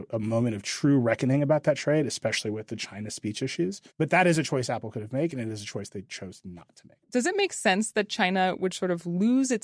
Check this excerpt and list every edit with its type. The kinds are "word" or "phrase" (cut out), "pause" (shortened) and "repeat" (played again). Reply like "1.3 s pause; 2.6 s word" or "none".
3.9 s pause; 7.0 s pause